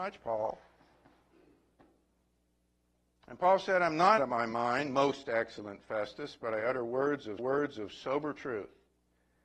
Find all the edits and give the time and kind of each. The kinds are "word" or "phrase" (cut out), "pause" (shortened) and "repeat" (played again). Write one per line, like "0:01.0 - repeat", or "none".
0:04.2 - word
0:07.4 - repeat